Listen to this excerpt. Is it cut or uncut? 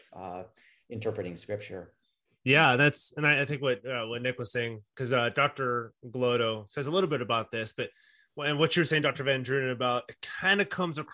uncut